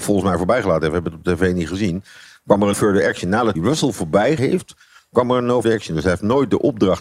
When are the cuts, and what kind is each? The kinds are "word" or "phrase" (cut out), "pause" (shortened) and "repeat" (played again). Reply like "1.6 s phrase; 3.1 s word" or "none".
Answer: 2.7 s word; 3.6 s word; 4.4 s word; 5.6 s word